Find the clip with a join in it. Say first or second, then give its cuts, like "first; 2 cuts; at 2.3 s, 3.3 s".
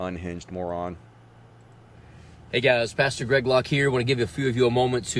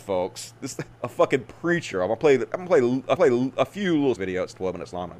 second; 3 cuts; at 0.9 s, 3.2 s, 4.2 s